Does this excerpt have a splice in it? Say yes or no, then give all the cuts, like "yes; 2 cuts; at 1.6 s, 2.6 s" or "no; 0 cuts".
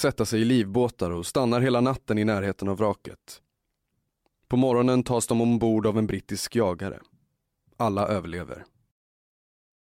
no; 0 cuts